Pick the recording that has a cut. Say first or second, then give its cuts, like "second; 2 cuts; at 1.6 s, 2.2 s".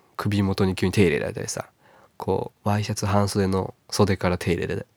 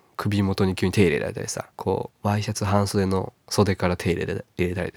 second; 1 cut; at 1.7 s